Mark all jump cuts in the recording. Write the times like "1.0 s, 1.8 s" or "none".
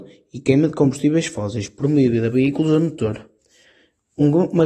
2.3 s